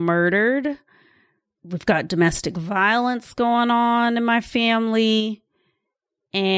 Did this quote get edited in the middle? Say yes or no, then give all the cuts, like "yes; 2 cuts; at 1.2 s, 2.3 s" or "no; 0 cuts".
no; 0 cuts